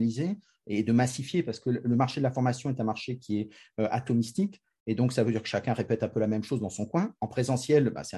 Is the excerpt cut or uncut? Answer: uncut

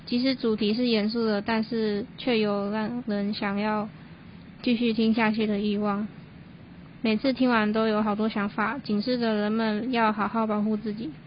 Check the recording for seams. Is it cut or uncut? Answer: uncut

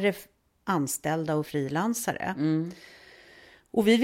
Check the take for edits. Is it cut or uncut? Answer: cut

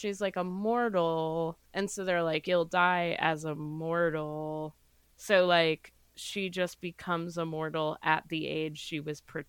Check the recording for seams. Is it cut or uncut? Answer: cut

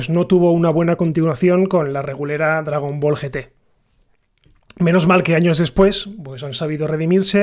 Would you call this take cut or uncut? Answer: uncut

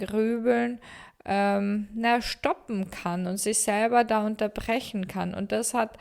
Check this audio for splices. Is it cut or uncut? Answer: uncut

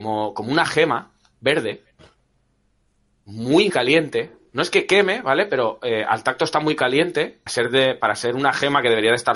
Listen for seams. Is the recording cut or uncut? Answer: cut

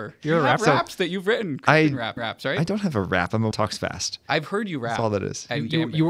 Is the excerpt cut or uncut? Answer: cut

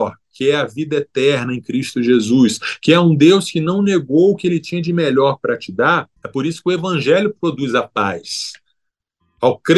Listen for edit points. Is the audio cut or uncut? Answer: cut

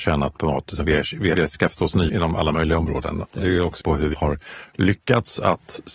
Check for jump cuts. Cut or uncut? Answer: cut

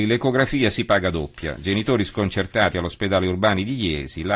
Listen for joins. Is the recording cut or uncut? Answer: uncut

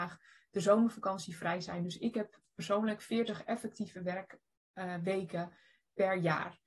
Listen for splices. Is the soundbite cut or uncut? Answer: uncut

